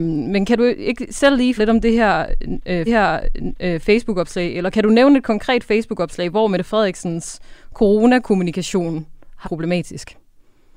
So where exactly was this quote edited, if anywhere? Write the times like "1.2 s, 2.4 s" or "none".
1.6 s, 2.9 s, 9.4 s